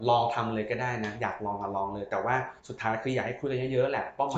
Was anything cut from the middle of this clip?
yes; 1 cut; at 2.6 s

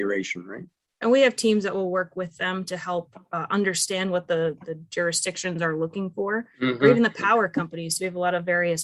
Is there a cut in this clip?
no; 0 cuts

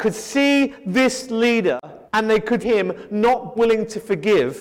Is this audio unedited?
no; 3 cuts; at 2.1 s, 2.6 s, 3.6 s

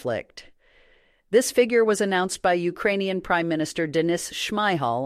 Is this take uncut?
yes; 0 cuts

